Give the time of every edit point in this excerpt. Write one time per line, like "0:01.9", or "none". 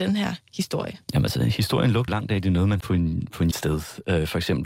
0:01.0
0:02.1
0:02.8
0:03.5